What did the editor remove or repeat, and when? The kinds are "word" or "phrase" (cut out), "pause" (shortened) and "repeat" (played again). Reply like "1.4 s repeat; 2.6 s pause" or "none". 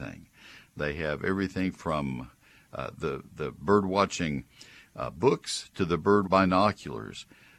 6.3 s word